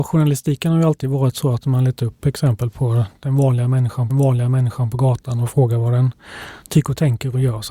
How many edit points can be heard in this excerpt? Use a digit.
1